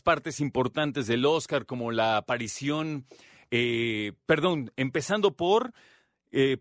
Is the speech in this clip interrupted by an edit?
no; 0 cuts

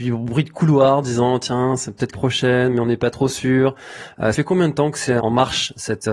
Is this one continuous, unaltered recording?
no; 3 cuts; at 2.1 s, 4.3 s, 5.2 s

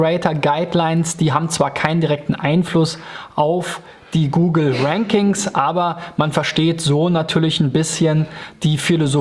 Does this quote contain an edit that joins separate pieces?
no; 0 cuts

